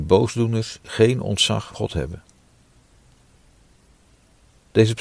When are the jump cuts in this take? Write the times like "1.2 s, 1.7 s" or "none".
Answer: 1.7 s